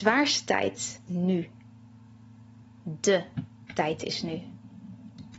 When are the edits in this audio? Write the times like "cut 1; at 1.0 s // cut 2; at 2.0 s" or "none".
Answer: cut 1; at 1.1 s